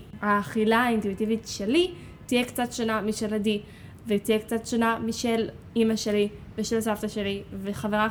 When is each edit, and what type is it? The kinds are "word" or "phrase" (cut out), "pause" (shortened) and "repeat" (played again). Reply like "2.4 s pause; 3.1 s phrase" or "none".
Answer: none